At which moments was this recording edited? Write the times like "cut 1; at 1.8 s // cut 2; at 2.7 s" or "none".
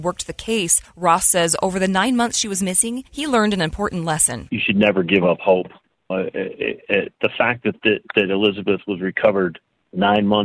cut 1; at 6.1 s